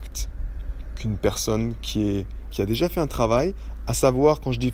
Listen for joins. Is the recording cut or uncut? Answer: cut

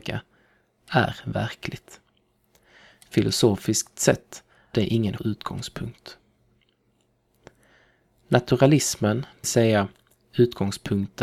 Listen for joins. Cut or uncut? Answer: cut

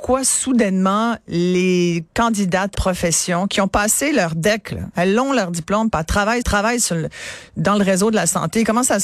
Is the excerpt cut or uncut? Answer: cut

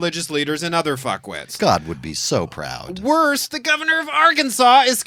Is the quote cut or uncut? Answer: uncut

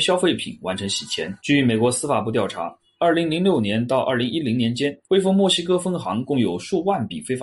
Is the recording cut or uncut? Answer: cut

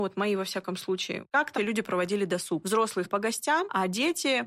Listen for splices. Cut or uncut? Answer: cut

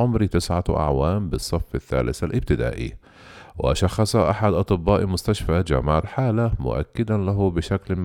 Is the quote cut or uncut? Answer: cut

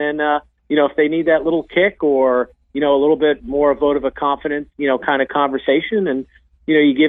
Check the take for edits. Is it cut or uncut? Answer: cut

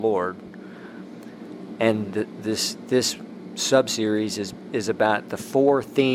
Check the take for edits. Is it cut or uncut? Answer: uncut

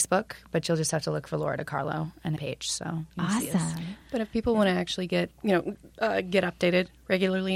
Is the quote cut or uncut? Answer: cut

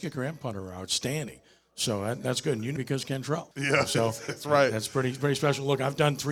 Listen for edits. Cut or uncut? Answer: cut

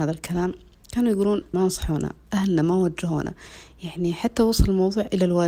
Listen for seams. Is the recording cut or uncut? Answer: cut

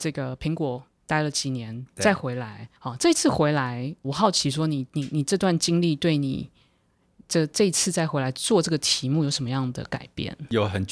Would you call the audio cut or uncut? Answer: cut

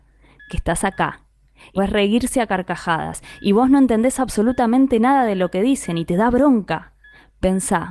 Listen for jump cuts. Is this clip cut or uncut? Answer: cut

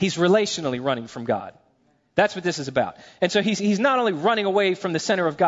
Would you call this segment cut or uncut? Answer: uncut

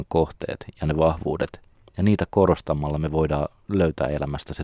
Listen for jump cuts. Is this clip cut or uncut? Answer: uncut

